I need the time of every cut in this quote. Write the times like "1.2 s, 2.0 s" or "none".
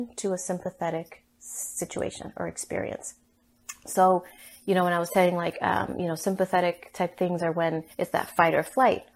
7.9 s